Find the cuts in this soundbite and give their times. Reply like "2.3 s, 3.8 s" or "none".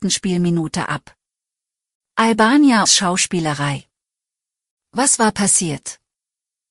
2.9 s